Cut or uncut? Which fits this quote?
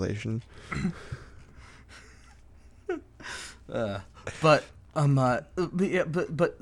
uncut